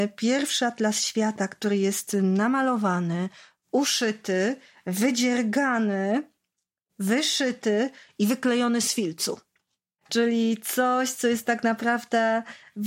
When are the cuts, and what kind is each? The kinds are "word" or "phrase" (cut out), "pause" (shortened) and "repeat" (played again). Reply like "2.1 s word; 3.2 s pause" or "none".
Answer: none